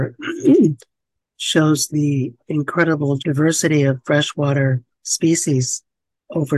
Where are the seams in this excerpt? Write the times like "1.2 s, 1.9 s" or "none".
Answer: 1.9 s, 3.2 s, 4.9 s